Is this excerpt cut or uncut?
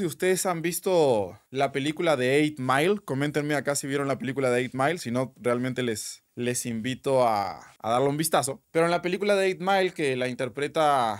cut